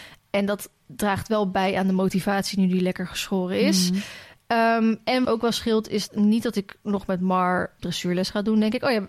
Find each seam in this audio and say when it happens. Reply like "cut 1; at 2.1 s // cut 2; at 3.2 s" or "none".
cut 1; at 5.2 s // cut 2; at 6.1 s // cut 3; at 7.8 s

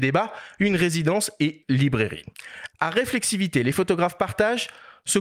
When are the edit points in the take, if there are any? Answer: cut 1; at 1.6 s

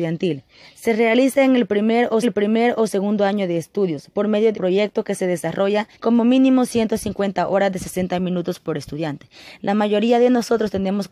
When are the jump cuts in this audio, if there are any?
cut 1; at 2.2 s // cut 2; at 4.5 s // cut 3; at 5.9 s

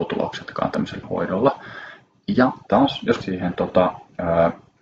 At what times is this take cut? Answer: cut 1; at 1.0 s // cut 2; at 2.7 s // cut 3; at 3.2 s

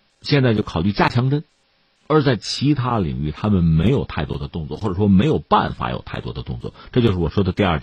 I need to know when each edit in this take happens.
none

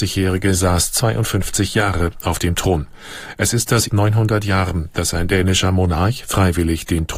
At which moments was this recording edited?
cut 1; at 3.9 s

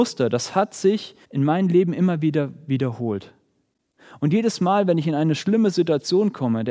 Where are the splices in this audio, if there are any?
cut 1; at 1.2 s

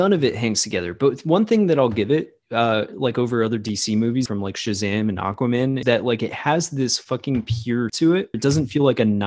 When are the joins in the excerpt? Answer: cut 1; at 2.4 s // cut 2; at 4.3 s // cut 3; at 5.8 s // cut 4; at 7.9 s // cut 5; at 8.3 s

